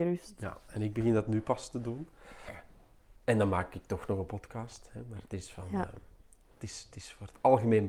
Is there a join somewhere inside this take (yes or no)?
no